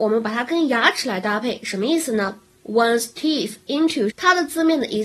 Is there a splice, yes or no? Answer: yes